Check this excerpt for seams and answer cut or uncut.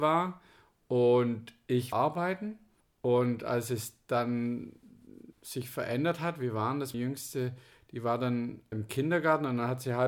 cut